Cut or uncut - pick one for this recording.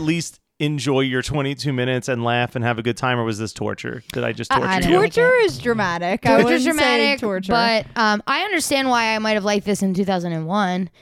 cut